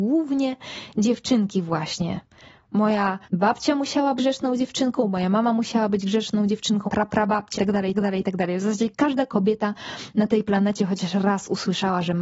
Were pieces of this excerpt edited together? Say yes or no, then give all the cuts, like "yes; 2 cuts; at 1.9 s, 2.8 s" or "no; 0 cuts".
yes; 5 cuts; at 3.2 s, 4.2 s, 6.9 s, 7.6 s, 7.9 s